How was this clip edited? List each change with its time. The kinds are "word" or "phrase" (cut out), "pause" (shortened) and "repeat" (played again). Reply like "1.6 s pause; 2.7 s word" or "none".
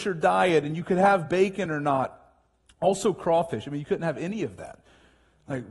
none